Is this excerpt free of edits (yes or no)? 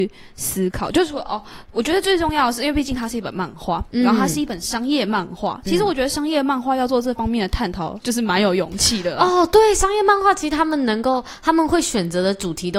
yes